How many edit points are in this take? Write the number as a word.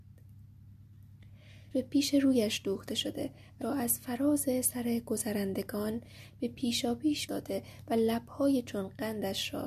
three